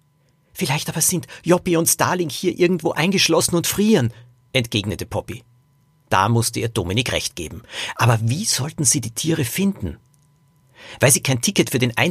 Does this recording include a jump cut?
no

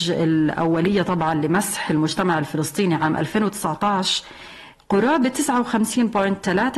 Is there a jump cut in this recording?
yes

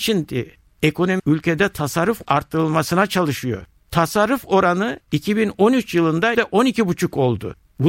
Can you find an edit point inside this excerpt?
yes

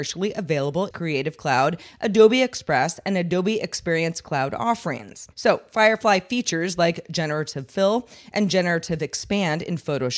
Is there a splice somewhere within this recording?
yes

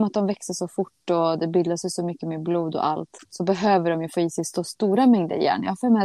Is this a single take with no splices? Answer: no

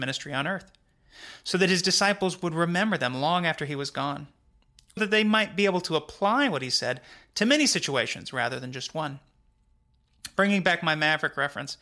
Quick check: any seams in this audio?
yes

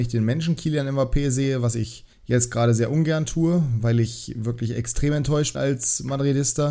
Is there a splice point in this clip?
yes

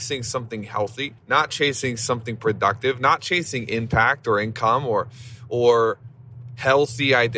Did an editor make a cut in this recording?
yes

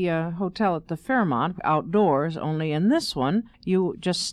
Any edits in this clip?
yes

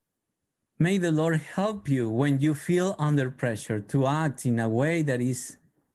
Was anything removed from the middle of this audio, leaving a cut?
no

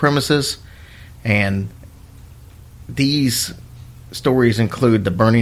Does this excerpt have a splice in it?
no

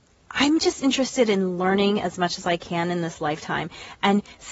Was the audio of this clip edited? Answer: no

